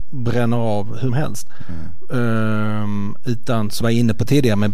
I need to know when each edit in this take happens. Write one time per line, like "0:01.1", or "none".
0:01.1
0:03.8

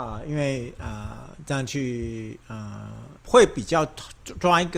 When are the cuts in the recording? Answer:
0:03.2

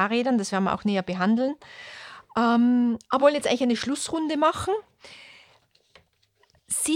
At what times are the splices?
0:03.2

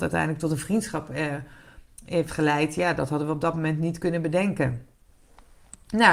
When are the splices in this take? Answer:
none

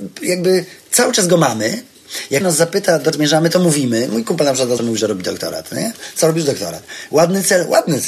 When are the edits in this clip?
0:02.4
0:03.1
0:04.8

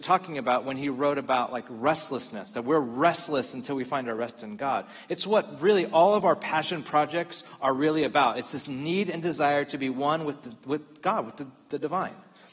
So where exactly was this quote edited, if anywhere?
none

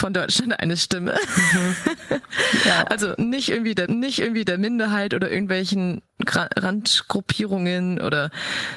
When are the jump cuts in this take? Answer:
0:03.9

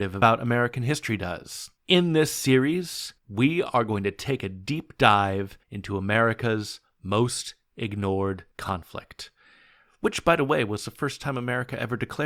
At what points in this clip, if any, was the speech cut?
0:01.8
0:03.2
0:05.6
0:08.5

